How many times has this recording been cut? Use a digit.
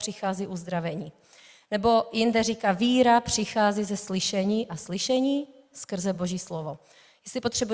0